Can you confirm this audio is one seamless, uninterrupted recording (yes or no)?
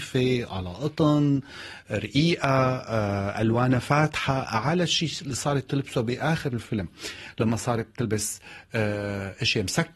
yes